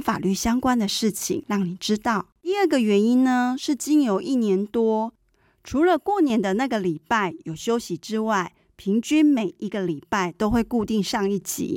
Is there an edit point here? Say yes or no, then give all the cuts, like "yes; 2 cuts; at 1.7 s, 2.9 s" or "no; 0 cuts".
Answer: yes; 1 cut; at 2.3 s